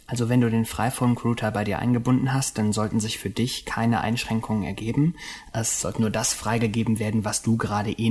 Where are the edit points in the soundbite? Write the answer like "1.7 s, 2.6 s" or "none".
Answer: none